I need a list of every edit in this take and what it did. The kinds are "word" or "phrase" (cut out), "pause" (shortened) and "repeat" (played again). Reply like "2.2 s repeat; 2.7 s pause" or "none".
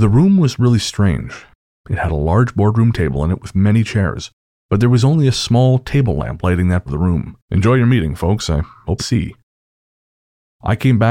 6.9 s word; 7.4 s pause; 9.0 s phrase